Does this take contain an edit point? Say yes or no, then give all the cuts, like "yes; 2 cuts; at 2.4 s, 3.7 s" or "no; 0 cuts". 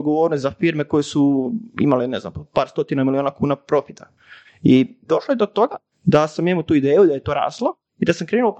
no; 0 cuts